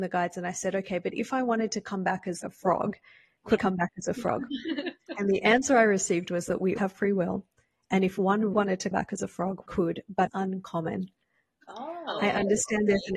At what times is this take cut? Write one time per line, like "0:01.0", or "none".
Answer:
0:02.4
0:03.6
0:06.8
0:08.5
0:08.9
0:09.7
0:10.3